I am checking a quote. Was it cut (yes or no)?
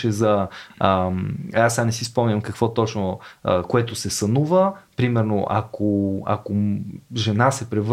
no